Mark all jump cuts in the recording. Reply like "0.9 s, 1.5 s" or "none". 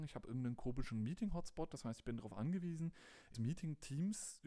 3.3 s